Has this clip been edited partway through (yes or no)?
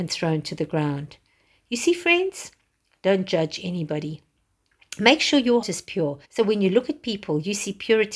yes